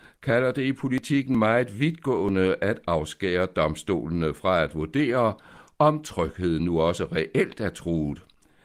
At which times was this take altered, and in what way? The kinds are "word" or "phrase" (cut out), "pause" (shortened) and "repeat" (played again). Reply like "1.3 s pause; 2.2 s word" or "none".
none